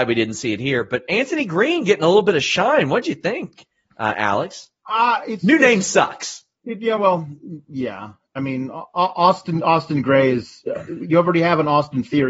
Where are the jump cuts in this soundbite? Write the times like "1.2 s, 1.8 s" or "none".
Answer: none